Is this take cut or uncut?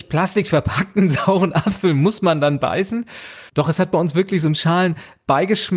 cut